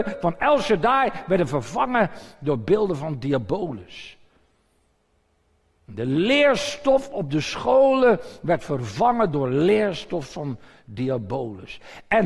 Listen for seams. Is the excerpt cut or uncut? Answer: uncut